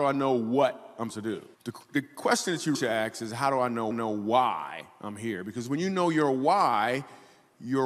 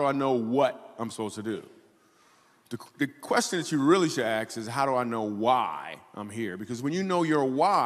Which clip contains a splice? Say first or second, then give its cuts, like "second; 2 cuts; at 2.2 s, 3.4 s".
first; 4 cuts; at 1.1 s, 1.5 s, 2.7 s, 3.9 s